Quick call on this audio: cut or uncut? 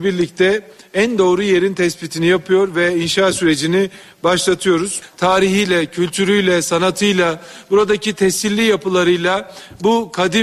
uncut